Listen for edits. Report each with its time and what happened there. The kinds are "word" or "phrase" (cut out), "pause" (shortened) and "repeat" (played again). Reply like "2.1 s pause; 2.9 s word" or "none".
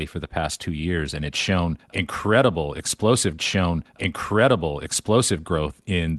3.4 s repeat